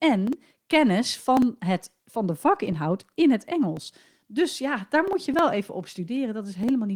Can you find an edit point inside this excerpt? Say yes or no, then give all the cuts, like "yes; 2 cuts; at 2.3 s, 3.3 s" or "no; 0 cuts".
no; 0 cuts